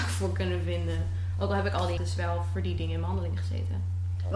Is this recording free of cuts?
no; 1 cut; at 2.0 s

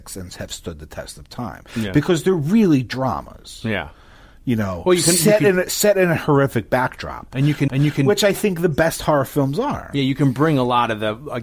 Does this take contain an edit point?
yes; 1 cut; at 7.7 s

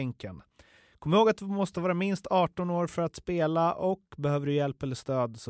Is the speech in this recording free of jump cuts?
yes; 0 cuts

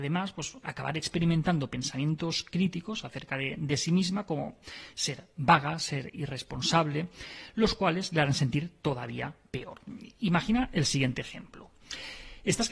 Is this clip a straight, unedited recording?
yes; 0 cuts

